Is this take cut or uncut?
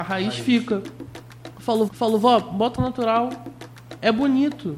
cut